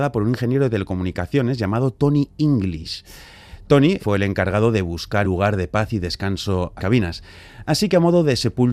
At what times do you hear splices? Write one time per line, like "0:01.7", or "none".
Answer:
0:04.0
0:05.2
0:06.8